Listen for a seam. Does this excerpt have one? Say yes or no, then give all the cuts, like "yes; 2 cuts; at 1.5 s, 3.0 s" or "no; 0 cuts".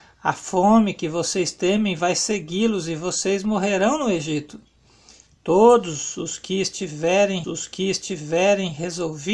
yes; 1 cut; at 7.4 s